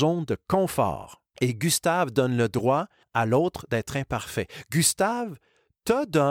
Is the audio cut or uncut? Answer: uncut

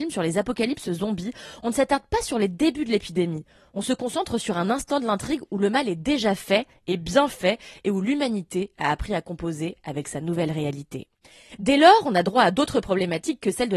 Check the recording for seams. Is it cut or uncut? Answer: uncut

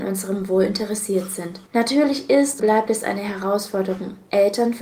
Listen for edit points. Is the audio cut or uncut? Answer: cut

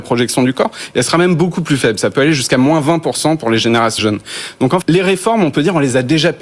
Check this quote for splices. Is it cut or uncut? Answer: cut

